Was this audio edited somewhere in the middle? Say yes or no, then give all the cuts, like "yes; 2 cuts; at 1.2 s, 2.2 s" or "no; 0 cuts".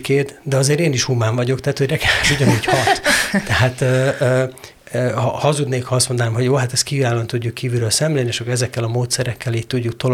yes; 1 cut; at 2.2 s